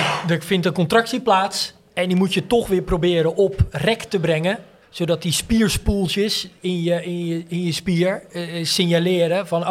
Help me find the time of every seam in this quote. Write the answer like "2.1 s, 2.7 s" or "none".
4.8 s